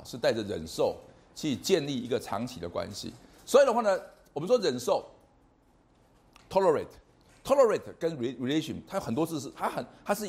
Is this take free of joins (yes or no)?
yes